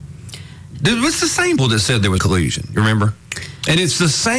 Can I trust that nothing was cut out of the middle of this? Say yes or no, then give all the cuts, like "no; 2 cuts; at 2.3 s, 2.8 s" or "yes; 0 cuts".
no; 2 cuts; at 1.6 s, 2.2 s